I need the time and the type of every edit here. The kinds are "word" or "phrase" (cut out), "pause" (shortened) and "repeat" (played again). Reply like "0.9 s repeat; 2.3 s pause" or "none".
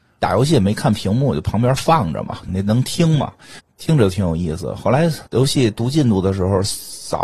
2.5 s phrase; 3.6 s pause; 5.3 s pause